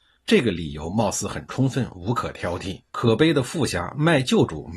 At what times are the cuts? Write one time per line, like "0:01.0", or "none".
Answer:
0:02.9